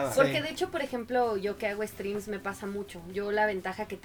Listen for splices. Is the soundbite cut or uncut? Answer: uncut